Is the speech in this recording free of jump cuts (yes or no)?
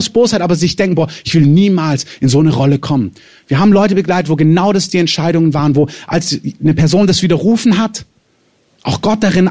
yes